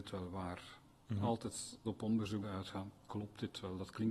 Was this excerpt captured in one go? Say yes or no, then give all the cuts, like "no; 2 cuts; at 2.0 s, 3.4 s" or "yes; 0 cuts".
no; 2 cuts; at 1.8 s, 2.4 s